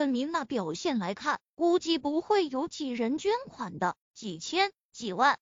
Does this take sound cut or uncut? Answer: cut